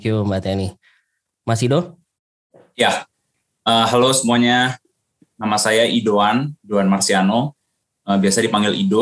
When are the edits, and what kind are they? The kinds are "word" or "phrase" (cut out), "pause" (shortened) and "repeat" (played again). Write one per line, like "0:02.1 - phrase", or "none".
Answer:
none

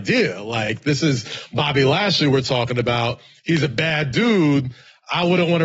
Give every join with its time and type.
none

